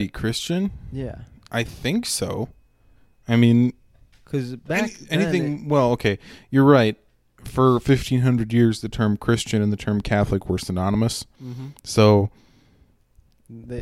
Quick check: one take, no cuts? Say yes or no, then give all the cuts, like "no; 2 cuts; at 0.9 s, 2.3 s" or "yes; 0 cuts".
yes; 0 cuts